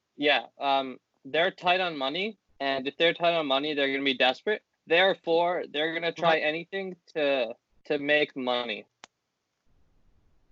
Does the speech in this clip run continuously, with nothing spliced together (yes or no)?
no